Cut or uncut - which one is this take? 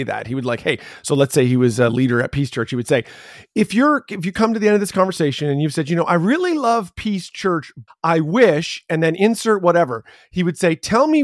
cut